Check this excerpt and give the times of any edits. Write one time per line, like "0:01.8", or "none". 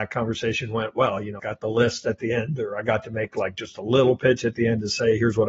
0:01.4